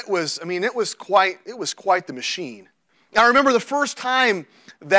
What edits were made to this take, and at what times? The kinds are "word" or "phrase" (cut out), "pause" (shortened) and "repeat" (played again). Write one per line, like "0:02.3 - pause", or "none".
0:02.9 - pause